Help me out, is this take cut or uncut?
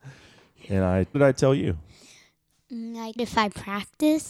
cut